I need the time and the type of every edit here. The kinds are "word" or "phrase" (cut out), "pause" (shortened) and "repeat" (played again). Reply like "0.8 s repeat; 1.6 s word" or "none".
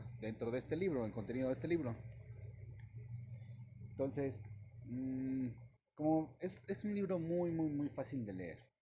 none